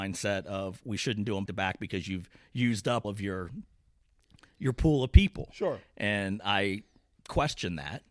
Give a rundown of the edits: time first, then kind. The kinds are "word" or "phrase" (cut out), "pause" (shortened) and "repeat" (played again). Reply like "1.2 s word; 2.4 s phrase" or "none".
1.5 s word; 3.0 s word